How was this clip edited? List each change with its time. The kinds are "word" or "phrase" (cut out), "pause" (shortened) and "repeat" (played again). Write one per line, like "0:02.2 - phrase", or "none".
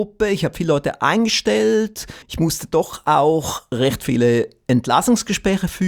0:02.2 - pause